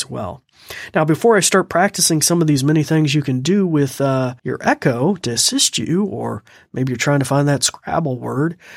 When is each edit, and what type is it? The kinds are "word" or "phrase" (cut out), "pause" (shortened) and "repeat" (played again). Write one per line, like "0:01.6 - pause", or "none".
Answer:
0:04.4 - pause